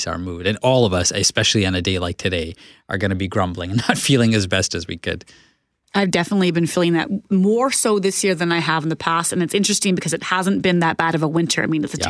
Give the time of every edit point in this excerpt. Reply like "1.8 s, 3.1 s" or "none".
none